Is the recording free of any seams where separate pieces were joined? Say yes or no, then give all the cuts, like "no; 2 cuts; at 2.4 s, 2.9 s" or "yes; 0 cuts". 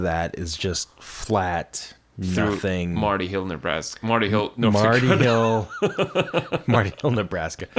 yes; 0 cuts